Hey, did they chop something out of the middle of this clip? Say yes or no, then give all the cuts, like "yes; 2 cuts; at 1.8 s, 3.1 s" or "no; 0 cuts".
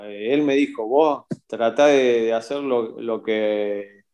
yes; 1 cut; at 1.4 s